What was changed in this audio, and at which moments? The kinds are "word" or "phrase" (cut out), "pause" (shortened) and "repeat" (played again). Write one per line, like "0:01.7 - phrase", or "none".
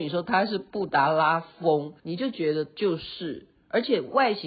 0:02.0 - pause

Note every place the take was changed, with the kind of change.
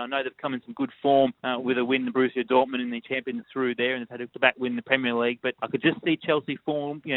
0:01.4 - pause
0:03.4 - phrase
0:04.3 - word
0:05.6 - pause

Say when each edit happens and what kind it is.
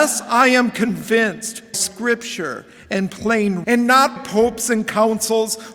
0:01.7 - word
0:03.6 - word
0:04.2 - word

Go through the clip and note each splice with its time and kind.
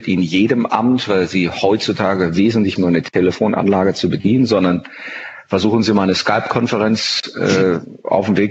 0:02.8 - phrase

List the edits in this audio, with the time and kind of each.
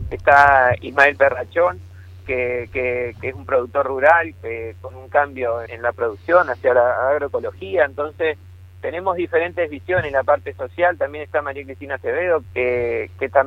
0:02.7 - repeat
0:05.7 - word
0:12.4 - word

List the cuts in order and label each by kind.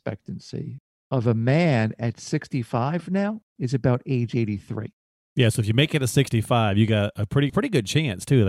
0:03.5 - pause
0:07.5 - phrase

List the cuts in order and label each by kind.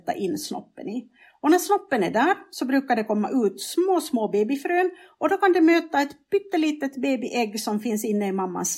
none

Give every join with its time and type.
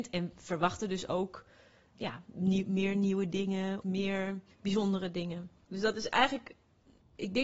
0:01.9 - word
0:03.8 - word

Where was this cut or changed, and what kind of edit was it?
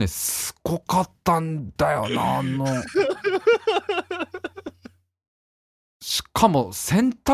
none

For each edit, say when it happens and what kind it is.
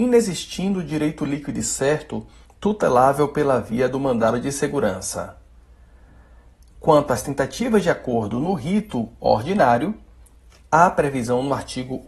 none

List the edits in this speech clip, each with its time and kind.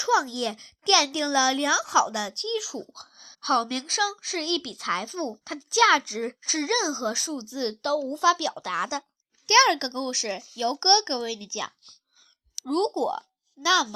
0:03.3 - pause
0:05.4 - pause
0:09.2 - pause

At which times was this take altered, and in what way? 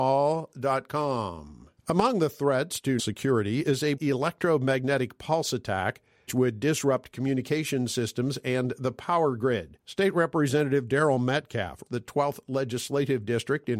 0:01.8 - pause
0:03.0 - word
0:04.0 - word
0:06.3 - word
0:09.8 - pause
0:11.9 - word

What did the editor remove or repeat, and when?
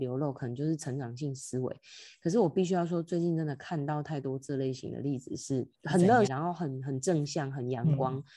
0:05.7 - pause
0:06.3 - phrase

